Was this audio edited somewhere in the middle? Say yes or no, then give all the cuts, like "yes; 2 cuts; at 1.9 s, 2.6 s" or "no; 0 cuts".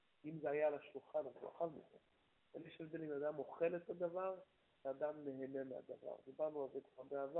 no; 0 cuts